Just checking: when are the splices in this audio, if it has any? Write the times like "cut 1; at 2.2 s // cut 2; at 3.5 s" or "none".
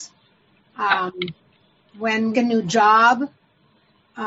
cut 1; at 2.3 s